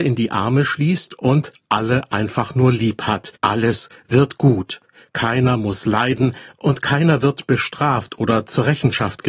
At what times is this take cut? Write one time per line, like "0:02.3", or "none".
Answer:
0:03.3
0:04.9